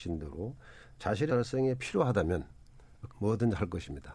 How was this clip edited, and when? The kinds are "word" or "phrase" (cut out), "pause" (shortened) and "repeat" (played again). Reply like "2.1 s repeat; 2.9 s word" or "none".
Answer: 1.3 s word; 3.1 s word

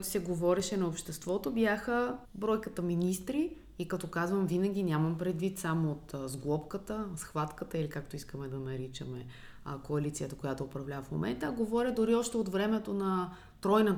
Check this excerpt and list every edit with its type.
2.2 s pause

